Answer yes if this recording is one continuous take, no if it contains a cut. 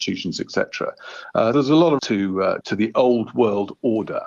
no